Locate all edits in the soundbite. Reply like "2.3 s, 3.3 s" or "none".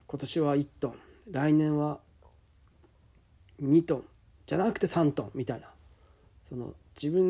none